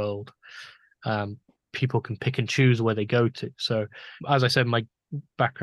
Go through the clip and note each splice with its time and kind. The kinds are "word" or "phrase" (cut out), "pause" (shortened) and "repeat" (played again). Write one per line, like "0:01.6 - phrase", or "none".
0:01.5 - pause
0:04.2 - pause